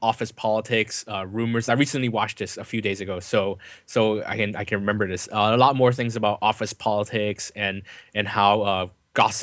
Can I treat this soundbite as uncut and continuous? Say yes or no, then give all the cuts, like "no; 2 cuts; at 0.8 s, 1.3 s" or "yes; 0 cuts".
yes; 0 cuts